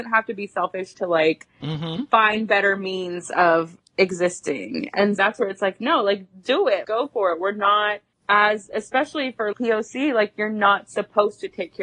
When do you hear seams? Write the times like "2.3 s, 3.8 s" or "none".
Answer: 5.2 s, 6.8 s, 9.5 s